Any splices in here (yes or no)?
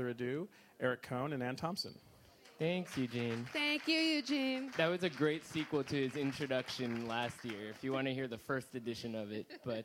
no